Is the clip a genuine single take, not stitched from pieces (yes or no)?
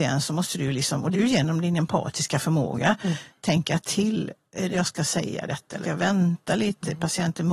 no